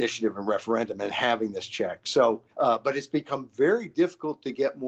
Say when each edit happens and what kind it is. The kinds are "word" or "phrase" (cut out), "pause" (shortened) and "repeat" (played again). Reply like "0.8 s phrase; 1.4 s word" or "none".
2.5 s pause